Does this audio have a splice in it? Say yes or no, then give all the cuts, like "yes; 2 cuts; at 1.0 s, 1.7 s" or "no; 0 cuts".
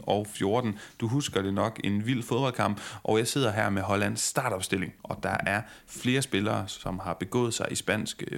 yes; 1 cut; at 5.0 s